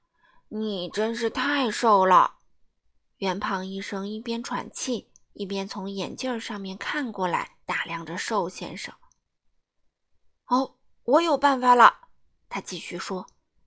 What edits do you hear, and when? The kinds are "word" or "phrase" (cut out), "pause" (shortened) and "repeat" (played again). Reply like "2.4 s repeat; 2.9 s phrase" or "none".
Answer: 7.6 s pause